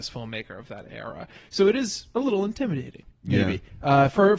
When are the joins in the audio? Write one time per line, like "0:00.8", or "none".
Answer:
none